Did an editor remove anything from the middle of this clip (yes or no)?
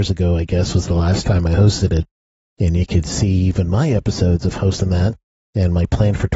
no